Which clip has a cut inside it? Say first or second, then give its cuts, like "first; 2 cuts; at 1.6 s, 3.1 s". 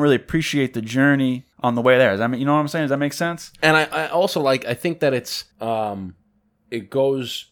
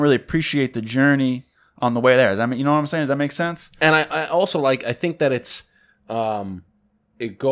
first; 2 cuts; at 1.5 s, 5.5 s